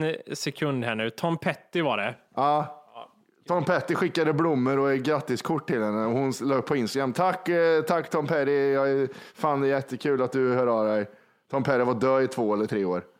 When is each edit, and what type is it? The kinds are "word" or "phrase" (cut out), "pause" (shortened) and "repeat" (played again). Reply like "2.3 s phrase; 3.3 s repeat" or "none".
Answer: none